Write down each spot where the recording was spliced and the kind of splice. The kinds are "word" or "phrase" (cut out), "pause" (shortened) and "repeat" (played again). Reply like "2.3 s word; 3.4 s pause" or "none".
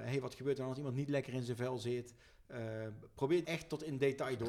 3.4 s word